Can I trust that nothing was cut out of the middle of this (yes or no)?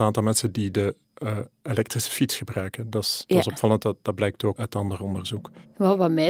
no